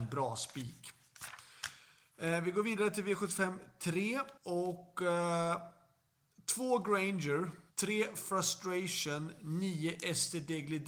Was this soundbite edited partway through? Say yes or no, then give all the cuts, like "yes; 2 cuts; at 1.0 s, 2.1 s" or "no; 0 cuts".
yes; 2 cuts; at 4.4 s, 7.7 s